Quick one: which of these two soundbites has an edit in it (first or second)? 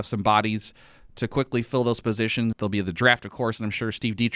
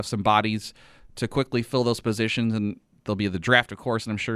first